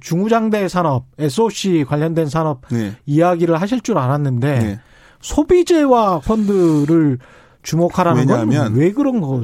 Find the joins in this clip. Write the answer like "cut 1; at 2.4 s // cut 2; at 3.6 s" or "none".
cut 1; at 6.2 s